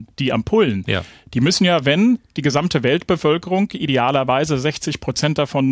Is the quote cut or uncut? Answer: uncut